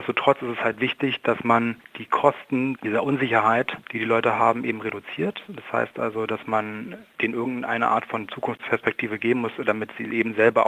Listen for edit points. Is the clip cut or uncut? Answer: uncut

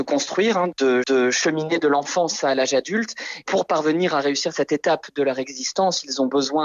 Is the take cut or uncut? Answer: cut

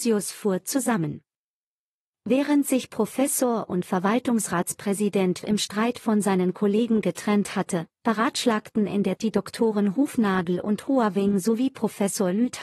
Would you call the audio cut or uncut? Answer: cut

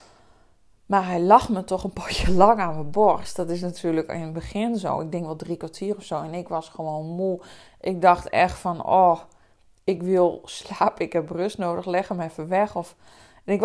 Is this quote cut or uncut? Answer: uncut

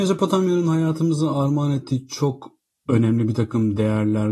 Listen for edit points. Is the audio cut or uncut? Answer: uncut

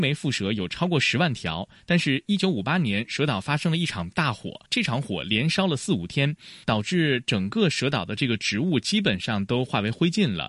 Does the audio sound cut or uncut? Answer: cut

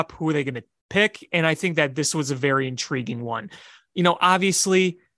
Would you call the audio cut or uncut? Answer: uncut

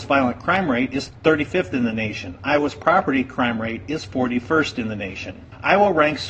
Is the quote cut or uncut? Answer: uncut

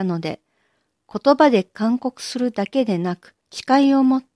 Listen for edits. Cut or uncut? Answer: cut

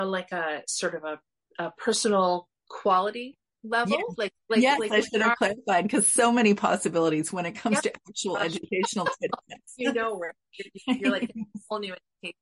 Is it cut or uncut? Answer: uncut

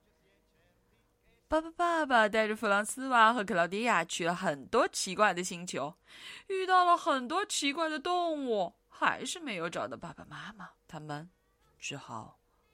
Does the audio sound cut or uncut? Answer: cut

